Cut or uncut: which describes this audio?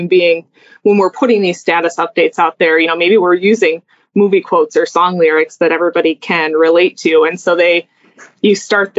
uncut